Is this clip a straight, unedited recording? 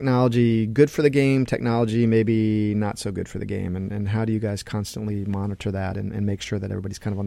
yes; 0 cuts

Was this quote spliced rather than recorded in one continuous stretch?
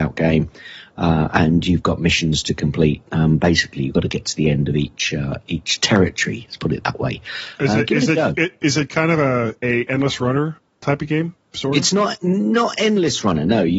no; 0 cuts

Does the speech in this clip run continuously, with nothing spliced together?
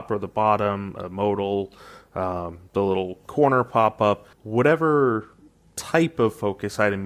no; 1 cut; at 4.3 s

